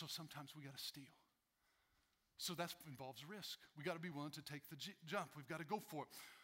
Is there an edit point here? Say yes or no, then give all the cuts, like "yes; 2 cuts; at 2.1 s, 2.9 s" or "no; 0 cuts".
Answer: no; 0 cuts